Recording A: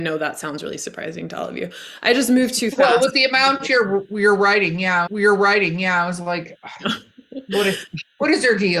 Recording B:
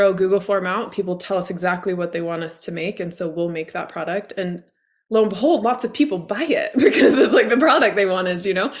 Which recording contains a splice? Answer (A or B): A